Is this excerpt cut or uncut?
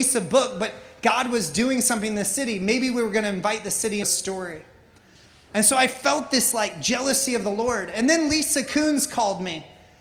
cut